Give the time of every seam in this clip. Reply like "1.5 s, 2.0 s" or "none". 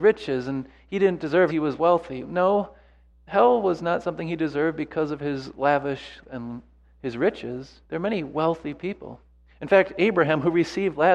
1.5 s, 3.1 s, 6.2 s, 7.8 s